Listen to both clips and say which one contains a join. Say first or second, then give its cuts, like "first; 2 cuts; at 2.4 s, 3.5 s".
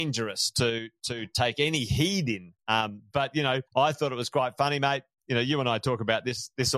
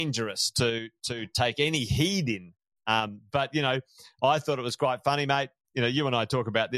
first; 2 cuts; at 2.6 s, 3.7 s